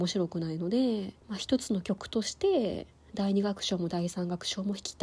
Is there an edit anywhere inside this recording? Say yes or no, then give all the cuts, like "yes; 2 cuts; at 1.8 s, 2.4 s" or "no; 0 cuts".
yes; 1 cut; at 1.2 s